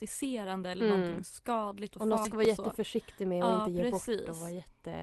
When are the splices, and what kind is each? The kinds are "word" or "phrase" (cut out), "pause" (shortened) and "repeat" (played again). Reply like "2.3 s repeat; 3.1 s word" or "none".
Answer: 2.2 s word